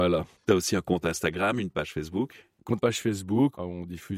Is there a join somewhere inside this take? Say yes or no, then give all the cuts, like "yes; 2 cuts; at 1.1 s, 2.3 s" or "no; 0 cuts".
yes; 1 cut; at 2.8 s